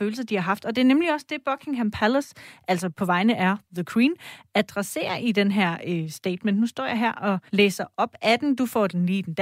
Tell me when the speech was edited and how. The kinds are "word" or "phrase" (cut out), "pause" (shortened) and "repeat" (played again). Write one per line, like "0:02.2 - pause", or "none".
0:07.5 - pause